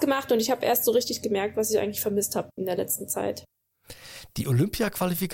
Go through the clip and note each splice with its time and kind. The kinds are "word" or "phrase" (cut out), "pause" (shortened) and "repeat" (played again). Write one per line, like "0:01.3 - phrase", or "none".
none